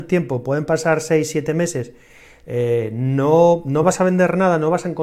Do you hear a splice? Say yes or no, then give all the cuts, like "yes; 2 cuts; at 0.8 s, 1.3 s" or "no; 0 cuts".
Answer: no; 0 cuts